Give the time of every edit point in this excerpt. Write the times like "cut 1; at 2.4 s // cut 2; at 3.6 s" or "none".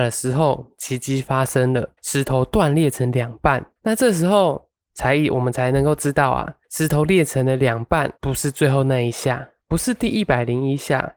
cut 1; at 2.0 s // cut 2; at 3.8 s // cut 3; at 6.6 s // cut 4; at 8.2 s